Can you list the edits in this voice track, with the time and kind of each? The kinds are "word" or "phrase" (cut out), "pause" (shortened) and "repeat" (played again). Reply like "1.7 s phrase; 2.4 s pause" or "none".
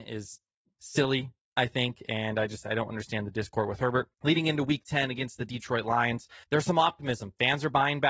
4.1 s pause; 6.4 s pause